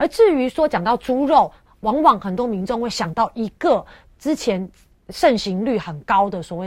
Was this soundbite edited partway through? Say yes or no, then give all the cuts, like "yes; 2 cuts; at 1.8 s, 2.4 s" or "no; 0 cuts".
no; 0 cuts